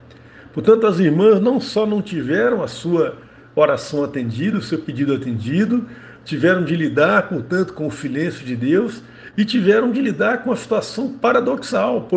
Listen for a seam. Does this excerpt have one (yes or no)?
no